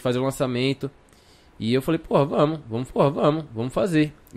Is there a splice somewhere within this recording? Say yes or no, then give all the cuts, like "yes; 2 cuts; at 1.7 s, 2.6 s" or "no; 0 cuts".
yes; 1 cut; at 2.9 s